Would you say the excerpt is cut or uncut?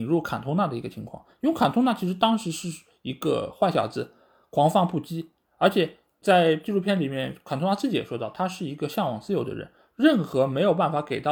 uncut